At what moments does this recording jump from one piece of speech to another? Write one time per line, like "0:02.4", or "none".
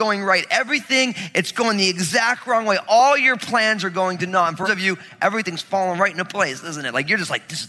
0:04.6

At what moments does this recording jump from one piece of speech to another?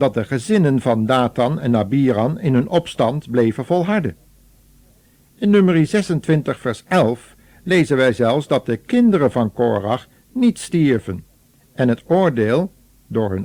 none

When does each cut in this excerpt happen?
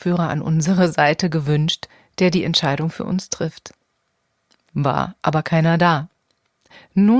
none

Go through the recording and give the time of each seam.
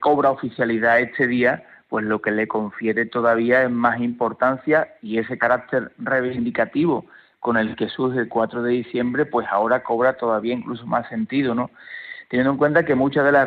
none

